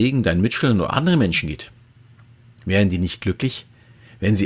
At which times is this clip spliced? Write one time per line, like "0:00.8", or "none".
none